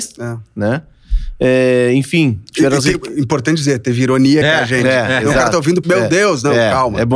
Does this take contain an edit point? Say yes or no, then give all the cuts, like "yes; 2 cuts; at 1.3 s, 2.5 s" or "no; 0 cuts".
yes; 2 cuts; at 4.4 s, 5.8 s